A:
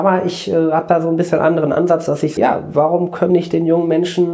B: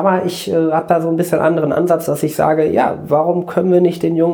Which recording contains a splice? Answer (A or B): A